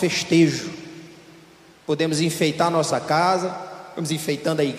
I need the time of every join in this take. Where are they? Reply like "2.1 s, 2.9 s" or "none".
none